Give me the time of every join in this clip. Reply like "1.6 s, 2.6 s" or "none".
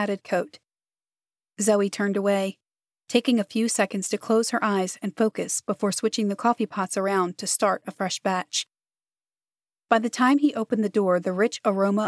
none